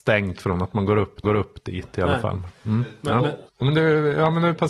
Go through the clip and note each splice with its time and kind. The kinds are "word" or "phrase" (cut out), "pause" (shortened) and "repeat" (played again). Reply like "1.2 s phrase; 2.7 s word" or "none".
1.2 s repeat; 3.5 s pause